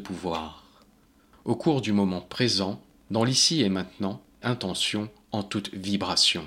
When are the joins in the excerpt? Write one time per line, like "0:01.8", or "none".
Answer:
0:04.4